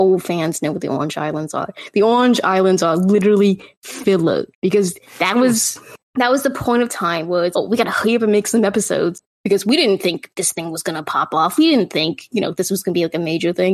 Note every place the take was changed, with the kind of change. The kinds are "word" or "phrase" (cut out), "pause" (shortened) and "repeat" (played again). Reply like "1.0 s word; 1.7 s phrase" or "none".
4.5 s pause; 6.0 s pause; 7.5 s word; 9.3 s pause